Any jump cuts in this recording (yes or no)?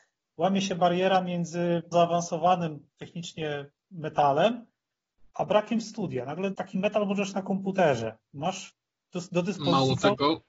yes